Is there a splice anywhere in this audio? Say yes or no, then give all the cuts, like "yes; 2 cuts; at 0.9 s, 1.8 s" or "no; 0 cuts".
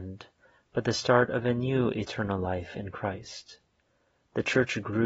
no; 0 cuts